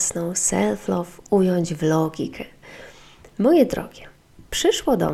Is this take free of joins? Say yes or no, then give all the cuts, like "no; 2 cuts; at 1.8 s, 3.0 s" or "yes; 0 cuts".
yes; 0 cuts